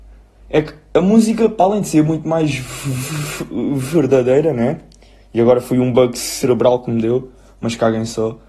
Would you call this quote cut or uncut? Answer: uncut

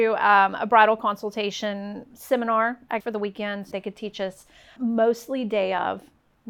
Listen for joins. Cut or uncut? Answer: cut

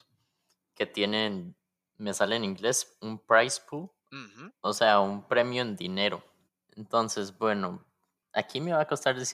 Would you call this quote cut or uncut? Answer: cut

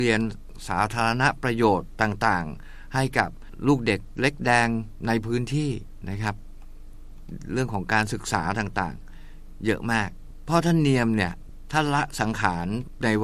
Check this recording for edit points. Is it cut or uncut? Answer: uncut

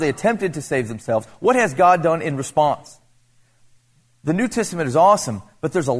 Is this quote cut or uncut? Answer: uncut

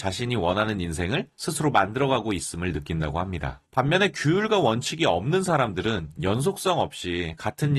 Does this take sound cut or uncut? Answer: cut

